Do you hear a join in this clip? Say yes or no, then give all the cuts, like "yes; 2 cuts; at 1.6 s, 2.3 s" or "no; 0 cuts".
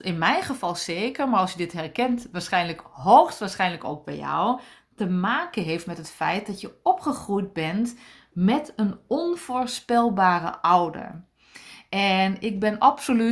no; 0 cuts